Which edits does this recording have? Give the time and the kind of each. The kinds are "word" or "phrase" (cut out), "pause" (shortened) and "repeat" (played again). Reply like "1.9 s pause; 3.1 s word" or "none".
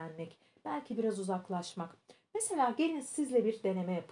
none